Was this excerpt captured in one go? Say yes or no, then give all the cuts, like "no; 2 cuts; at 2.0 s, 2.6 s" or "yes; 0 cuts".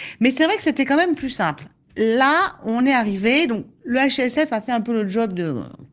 yes; 0 cuts